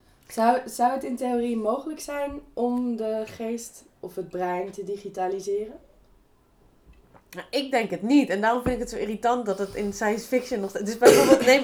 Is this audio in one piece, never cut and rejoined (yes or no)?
no